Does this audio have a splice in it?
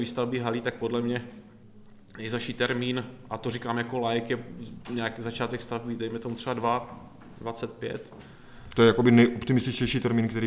no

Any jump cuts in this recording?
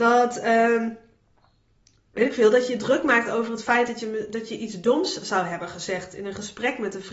no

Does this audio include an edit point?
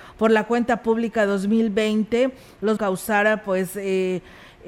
yes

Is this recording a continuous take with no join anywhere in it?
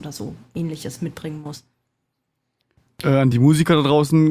yes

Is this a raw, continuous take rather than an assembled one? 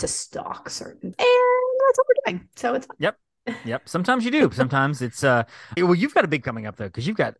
no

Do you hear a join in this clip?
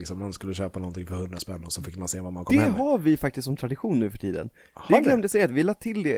no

